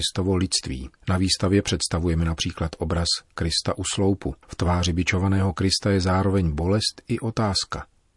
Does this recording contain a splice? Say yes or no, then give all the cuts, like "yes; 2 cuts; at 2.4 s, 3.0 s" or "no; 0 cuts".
yes; 2 cuts; at 1.0 s, 4.4 s